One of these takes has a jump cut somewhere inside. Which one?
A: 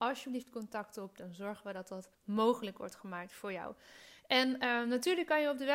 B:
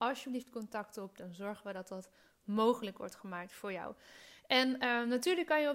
A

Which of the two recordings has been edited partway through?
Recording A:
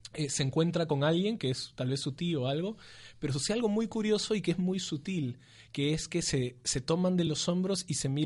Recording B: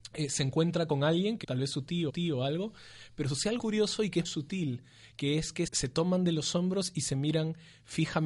B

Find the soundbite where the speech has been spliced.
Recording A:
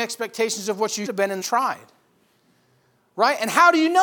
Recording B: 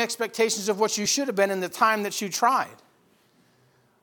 A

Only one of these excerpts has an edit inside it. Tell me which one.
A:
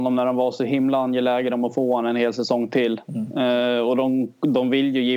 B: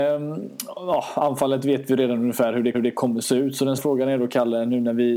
B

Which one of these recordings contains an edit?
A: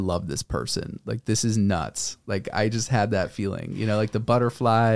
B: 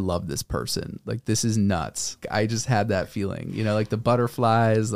B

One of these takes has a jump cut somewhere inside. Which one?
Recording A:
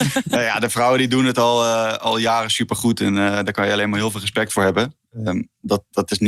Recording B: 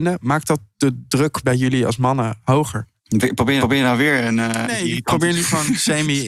B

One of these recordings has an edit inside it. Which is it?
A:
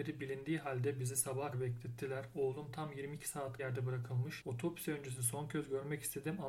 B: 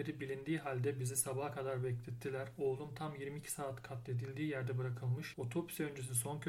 A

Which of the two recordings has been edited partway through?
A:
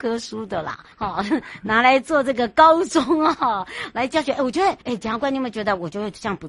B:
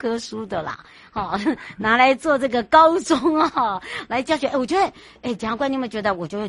A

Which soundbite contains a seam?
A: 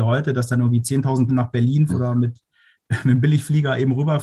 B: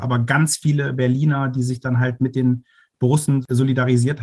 A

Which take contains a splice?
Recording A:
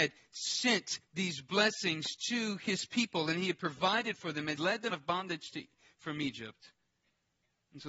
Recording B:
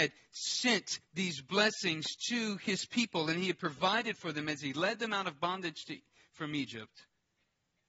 A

